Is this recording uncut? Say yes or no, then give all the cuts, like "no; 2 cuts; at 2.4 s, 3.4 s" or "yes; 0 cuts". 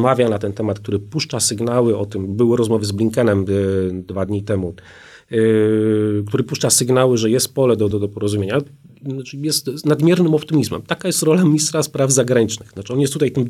yes; 0 cuts